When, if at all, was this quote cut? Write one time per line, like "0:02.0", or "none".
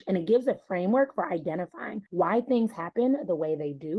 0:02.1